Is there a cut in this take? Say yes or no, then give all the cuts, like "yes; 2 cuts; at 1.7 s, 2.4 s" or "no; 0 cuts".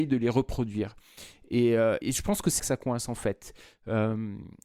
yes; 2 cuts; at 2.0 s, 2.6 s